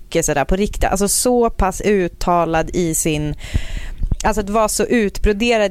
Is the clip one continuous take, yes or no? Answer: yes